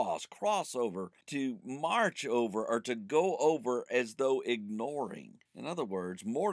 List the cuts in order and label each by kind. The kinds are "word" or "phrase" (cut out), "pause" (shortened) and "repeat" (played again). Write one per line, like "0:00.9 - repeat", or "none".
0:01.2 - pause
0:05.5 - pause